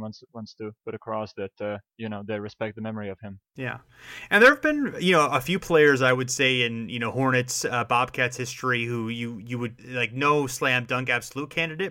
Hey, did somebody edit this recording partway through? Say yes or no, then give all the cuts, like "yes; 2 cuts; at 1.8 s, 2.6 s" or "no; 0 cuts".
yes; 1 cut; at 9.8 s